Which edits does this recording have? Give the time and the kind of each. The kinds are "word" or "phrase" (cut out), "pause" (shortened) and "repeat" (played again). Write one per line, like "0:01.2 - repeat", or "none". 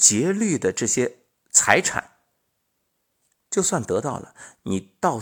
none